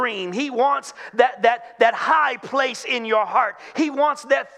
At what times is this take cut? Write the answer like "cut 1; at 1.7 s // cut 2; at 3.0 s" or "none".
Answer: none